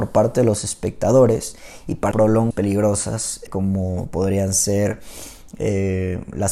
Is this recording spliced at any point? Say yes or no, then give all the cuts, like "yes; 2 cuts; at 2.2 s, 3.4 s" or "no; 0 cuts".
yes; 3 cuts; at 2.1 s, 2.5 s, 3.5 s